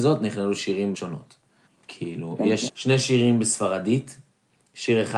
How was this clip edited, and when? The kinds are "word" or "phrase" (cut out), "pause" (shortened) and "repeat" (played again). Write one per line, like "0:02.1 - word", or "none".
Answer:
0:00.9 - word
0:01.7 - pause
0:02.7 - word